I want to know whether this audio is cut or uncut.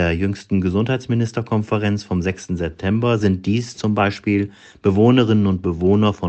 uncut